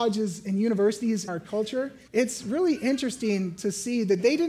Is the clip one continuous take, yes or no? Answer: no